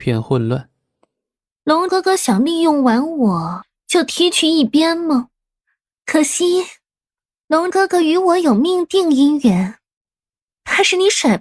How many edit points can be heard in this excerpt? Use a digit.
0